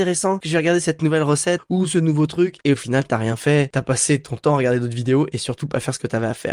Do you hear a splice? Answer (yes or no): yes